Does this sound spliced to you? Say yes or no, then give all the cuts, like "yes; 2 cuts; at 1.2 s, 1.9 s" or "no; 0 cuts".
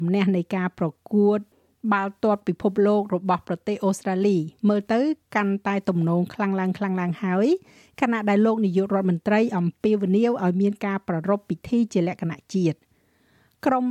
no; 0 cuts